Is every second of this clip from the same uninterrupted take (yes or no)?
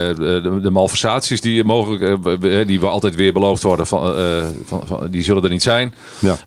yes